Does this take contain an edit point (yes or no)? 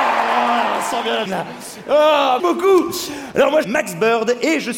yes